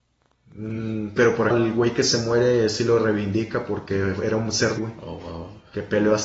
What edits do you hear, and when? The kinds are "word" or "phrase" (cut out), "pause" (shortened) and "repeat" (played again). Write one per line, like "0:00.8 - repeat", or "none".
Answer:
0:01.2 - word
0:01.5 - word
0:04.8 - word